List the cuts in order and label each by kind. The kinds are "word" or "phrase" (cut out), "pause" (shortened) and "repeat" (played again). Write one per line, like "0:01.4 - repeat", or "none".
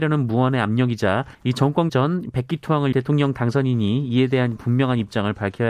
0:01.3 - pause
0:01.9 - word
0:02.9 - phrase